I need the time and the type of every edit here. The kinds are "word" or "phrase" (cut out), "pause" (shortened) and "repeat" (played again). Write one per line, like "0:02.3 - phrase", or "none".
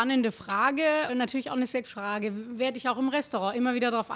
0:01.1 - word
0:01.8 - word